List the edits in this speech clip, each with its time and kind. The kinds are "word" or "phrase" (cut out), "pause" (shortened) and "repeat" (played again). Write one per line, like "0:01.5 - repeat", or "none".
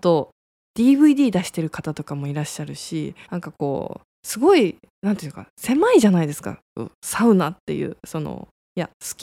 0:03.2 - pause
0:04.1 - pause